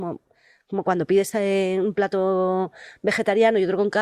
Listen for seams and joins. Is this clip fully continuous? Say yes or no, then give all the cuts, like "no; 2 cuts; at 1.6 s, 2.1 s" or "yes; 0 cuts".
yes; 0 cuts